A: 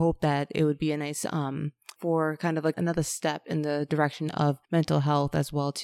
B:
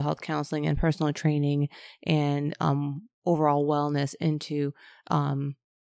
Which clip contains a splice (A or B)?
A